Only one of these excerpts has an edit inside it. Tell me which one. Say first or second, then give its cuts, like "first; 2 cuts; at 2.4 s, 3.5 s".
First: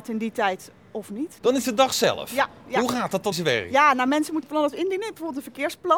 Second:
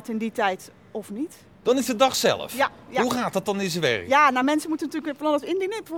first; 3 cuts; at 1.4 s, 3.3 s, 4.4 s